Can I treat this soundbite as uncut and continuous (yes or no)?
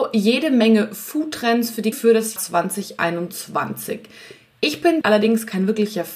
no